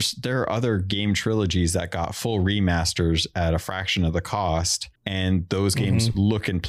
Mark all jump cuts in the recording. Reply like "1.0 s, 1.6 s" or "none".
5.0 s